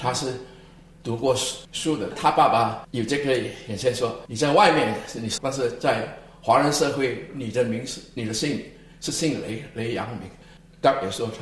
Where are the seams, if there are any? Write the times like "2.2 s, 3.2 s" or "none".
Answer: 2.1 s, 5.4 s